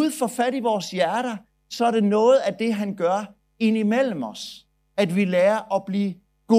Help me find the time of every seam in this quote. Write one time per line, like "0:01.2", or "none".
none